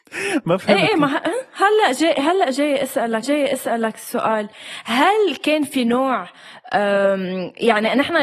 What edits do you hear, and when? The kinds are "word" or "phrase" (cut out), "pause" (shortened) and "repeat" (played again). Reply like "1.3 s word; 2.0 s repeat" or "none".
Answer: 3.2 s repeat